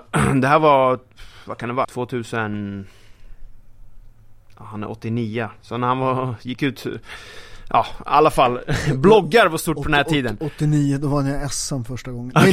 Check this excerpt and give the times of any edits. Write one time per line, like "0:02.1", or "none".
0:01.8